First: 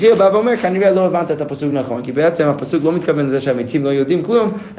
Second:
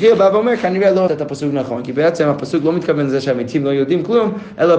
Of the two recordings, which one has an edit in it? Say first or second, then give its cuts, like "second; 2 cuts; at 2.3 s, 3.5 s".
second; 1 cut; at 1.1 s